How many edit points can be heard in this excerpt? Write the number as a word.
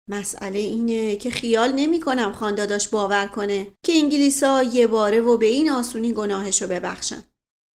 one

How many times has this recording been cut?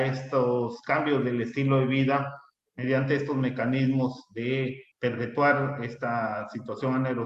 one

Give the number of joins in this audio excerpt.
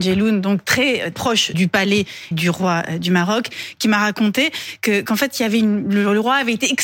three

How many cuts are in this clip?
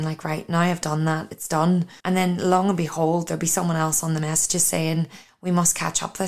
one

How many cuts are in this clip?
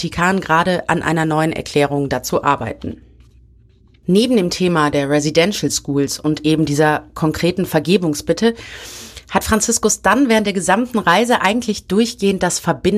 zero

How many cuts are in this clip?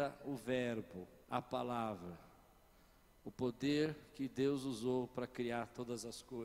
one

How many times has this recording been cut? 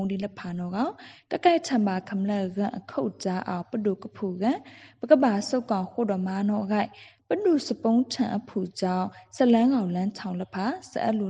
zero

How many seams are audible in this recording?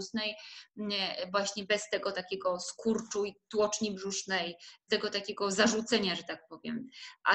one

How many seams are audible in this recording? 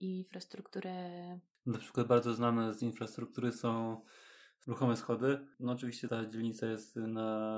zero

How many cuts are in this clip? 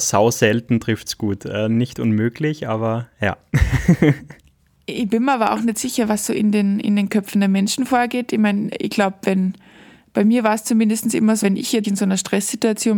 two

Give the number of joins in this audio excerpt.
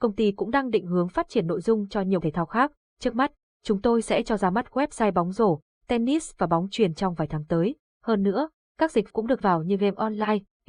three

